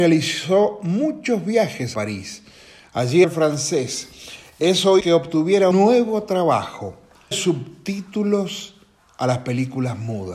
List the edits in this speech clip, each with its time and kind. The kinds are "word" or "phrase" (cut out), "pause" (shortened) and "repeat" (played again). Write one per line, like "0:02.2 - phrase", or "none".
0:01.9 - word
0:03.2 - word
0:05.0 - word
0:05.7 - word
0:07.3 - word